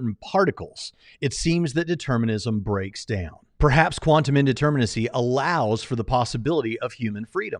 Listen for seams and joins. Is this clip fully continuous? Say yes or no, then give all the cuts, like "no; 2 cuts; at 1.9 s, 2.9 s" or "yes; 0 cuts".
yes; 0 cuts